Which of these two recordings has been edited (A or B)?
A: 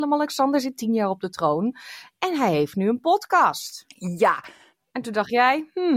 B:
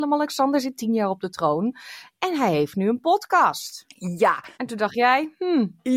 B